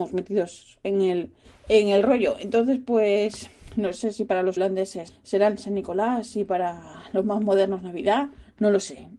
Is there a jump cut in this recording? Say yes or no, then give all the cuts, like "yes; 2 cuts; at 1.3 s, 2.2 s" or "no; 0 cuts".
yes; 1 cut; at 4.6 s